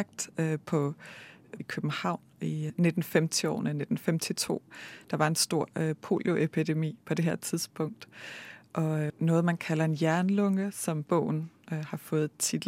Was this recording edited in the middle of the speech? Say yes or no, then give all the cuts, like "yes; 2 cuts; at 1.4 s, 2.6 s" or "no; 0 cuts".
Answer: yes; 3 cuts; at 1.6 s, 2.7 s, 9.1 s